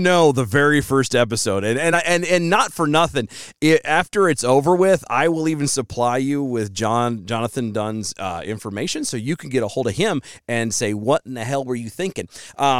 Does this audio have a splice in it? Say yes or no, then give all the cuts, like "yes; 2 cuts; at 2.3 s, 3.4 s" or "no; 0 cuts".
no; 0 cuts